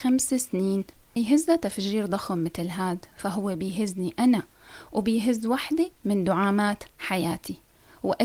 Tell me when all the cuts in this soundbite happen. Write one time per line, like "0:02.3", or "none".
0:01.2